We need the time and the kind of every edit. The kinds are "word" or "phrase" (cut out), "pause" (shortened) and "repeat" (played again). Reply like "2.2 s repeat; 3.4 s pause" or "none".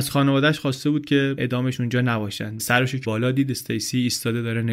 1.4 s word; 2.6 s word; 3.0 s word